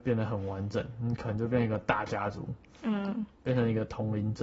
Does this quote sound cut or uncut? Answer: uncut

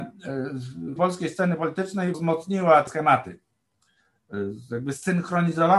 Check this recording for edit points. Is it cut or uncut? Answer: cut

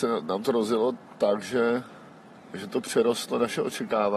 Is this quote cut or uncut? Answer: uncut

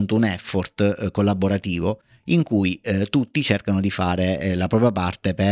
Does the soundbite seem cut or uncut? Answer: uncut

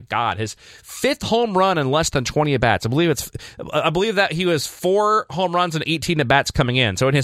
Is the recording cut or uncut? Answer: uncut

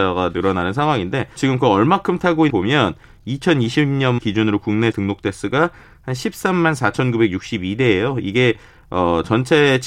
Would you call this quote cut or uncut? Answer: cut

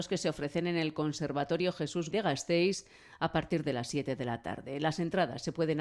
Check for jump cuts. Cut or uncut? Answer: cut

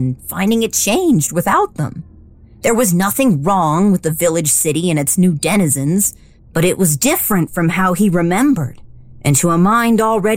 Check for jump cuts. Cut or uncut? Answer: uncut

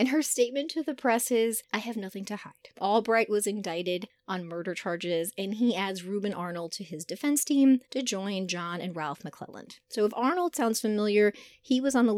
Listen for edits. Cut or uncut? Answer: cut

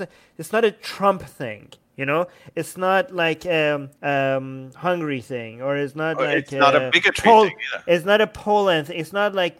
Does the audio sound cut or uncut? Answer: cut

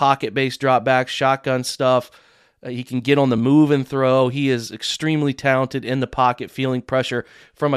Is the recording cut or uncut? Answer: uncut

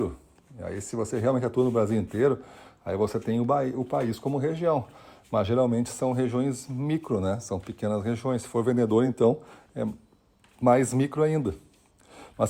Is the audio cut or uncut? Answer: uncut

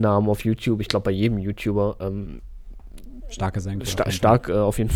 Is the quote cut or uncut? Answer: uncut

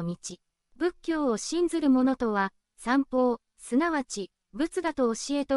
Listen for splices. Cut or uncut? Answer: uncut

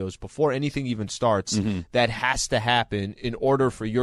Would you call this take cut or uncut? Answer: uncut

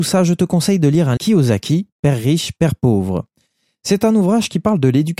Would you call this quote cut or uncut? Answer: cut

